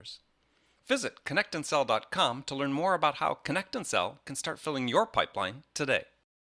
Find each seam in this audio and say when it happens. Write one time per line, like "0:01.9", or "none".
none